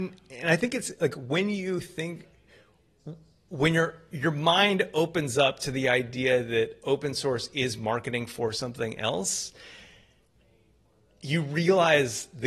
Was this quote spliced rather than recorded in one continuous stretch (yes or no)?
no